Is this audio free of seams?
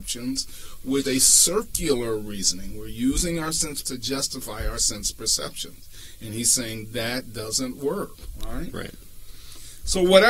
no; 2 cuts; at 1.1 s, 3.8 s

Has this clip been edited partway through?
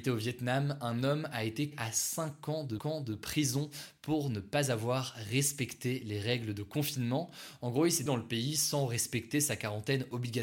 yes; 3 cuts; at 1.7 s, 2.8 s, 8.1 s

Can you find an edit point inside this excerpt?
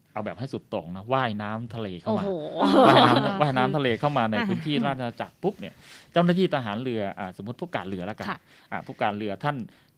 no; 0 cuts

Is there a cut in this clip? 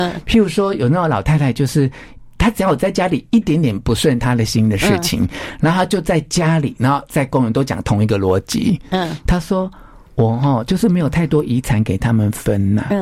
no; 0 cuts

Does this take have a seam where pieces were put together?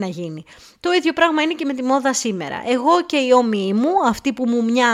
no; 0 cuts

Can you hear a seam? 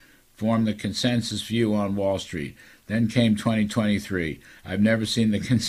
no; 0 cuts

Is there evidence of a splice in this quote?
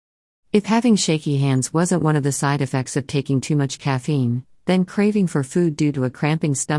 no; 0 cuts

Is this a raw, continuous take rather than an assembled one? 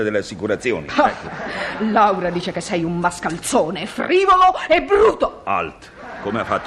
yes; 0 cuts

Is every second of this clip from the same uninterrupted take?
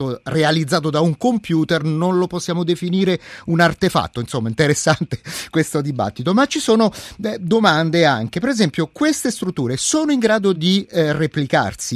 yes; 0 cuts

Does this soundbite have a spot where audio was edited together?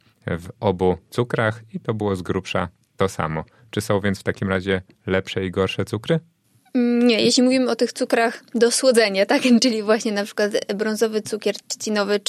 no; 0 cuts

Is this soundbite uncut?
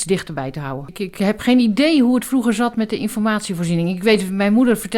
yes; 0 cuts

